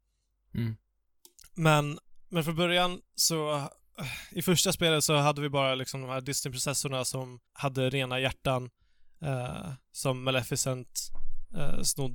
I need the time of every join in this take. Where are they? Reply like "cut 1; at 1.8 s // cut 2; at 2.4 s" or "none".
cut 1; at 7.5 s